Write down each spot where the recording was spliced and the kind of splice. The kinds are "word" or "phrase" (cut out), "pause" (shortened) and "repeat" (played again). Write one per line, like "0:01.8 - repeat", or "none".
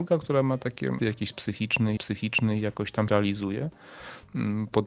0:01.0 - word
0:02.0 - repeat
0:03.1 - word